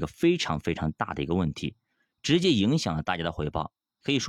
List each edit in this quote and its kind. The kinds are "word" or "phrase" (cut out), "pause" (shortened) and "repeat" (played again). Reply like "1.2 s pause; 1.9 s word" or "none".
none

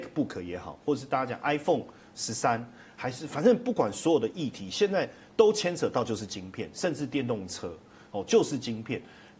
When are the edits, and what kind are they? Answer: none

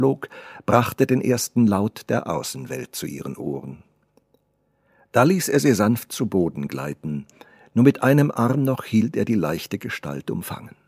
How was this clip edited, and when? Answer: none

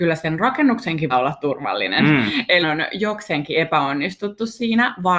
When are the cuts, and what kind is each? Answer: 1.1 s word; 2.6 s word

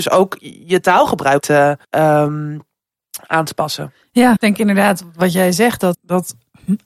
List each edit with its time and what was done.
1.4 s word; 1.8 s pause; 4.4 s word; 5.9 s word

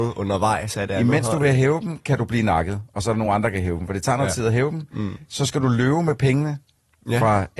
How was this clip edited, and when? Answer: none

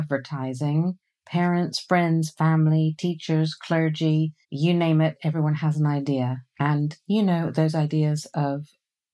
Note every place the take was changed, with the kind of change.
1.0 s pause; 4.4 s pause

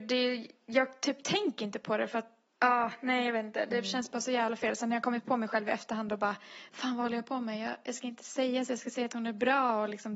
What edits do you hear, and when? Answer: 2.5 s pause

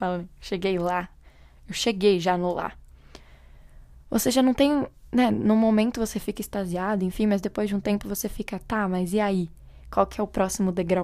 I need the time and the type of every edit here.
none

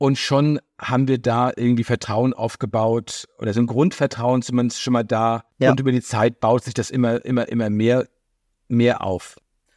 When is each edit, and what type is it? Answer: 5.5 s pause

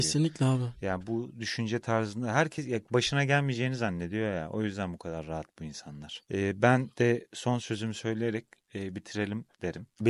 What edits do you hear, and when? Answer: none

